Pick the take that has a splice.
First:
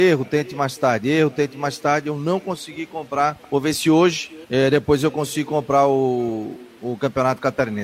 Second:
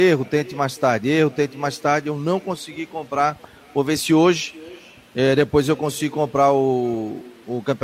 first; 2 cuts; at 3.4 s, 4.4 s

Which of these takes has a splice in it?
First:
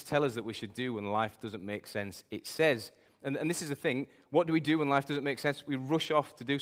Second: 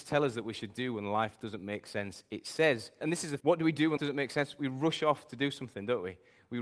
second; 3 cuts; at 3.0 s, 3.4 s, 4.0 s

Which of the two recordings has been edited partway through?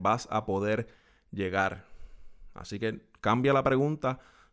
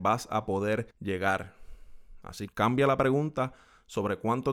second; 2 cuts; at 0.9 s, 2.5 s

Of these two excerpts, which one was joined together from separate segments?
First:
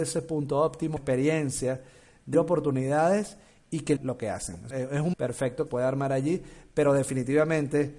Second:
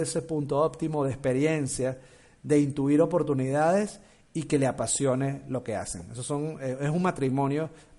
first; 6 cuts; at 1.0 s, 2.3 s, 4.0 s, 4.7 s, 5.1 s, 5.7 s

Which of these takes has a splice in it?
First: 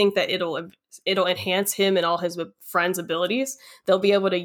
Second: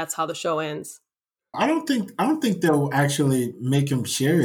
second; 1 cut; at 1.5 s

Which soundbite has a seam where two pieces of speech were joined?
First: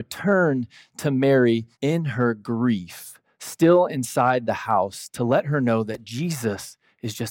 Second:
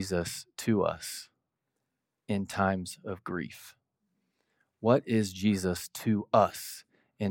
first; 1 cut; at 1.7 s

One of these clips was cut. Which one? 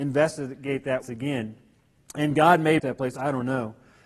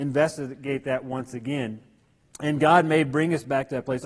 first; 2 cuts; at 1.0 s, 2.8 s

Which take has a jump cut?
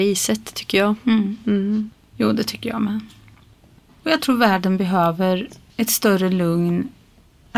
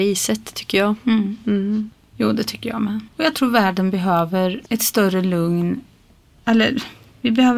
second; 2 cuts; at 3.1 s, 4.7 s

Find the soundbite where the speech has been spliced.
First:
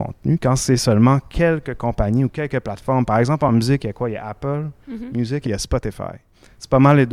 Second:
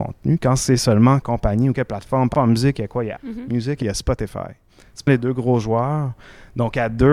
second; 5 cuts; at 1.2 s, 1.7 s, 2.3 s, 3.2 s, 5.1 s

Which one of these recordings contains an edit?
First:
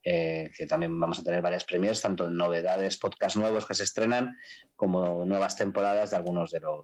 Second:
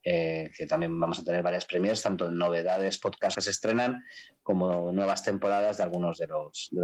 second; 1 cut; at 3.3 s

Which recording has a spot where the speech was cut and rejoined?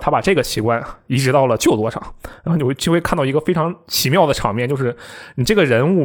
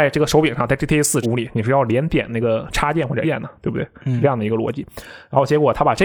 second; 2 cuts; at 1.2 s, 3.2 s

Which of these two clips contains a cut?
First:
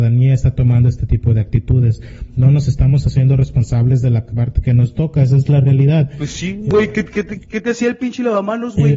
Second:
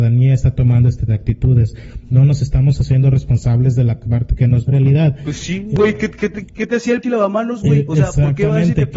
second; 3 cuts; at 1.1 s, 4.7 s, 7.0 s

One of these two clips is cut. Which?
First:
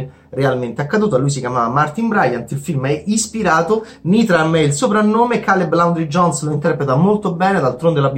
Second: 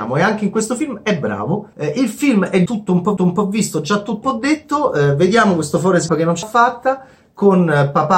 second; 6 cuts; at 1.7 s, 2.7 s, 3.2 s, 4.2 s, 6.1 s, 6.4 s

